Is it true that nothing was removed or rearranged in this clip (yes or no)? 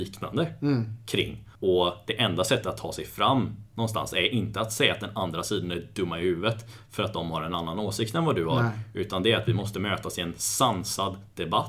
no